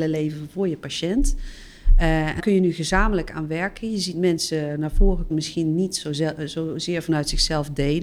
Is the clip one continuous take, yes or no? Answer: no